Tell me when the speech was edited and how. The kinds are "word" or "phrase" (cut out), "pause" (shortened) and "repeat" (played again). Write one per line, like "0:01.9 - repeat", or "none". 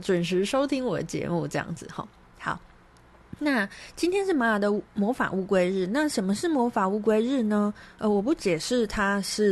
0:04.8 - pause